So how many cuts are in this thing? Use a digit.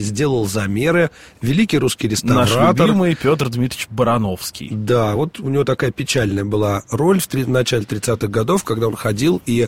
0